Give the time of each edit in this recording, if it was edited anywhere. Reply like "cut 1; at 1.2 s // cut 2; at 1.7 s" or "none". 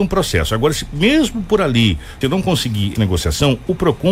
cut 1; at 2.2 s // cut 2; at 2.9 s